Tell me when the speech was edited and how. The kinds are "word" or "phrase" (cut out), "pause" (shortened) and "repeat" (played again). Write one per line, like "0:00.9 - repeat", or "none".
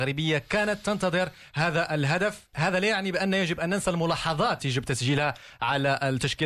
0:02.5 - word
0:04.6 - word